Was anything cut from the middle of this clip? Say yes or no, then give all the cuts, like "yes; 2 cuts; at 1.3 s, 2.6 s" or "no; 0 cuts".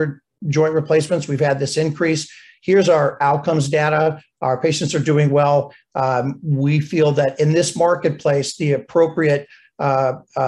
no; 0 cuts